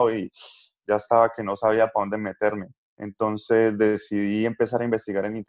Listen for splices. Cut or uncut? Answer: cut